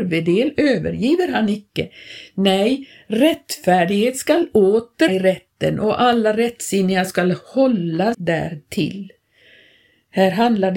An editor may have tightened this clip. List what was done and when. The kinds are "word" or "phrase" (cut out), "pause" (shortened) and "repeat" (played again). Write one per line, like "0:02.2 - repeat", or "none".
0:05.1 - word
0:08.1 - word